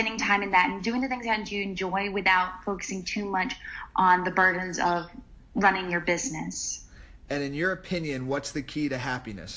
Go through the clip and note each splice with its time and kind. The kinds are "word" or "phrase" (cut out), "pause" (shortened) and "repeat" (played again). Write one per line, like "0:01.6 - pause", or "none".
none